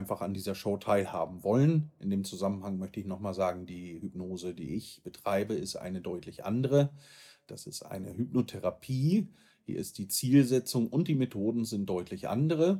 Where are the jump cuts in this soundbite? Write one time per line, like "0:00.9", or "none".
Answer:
none